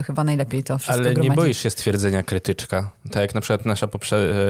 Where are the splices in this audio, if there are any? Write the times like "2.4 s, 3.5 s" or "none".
none